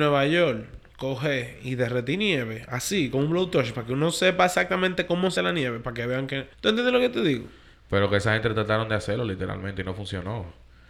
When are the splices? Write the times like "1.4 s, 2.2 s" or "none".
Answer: 5.4 s, 6.5 s